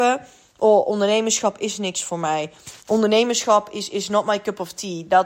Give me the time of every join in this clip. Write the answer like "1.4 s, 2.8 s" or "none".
none